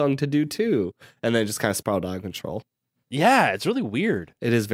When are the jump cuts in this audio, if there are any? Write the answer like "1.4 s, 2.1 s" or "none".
none